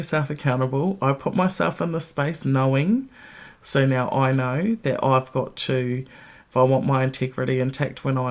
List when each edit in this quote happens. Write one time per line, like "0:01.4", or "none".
none